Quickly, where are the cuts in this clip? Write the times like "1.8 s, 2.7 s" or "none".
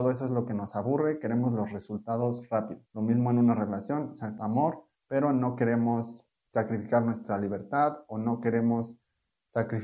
2.9 s, 4.4 s, 5.0 s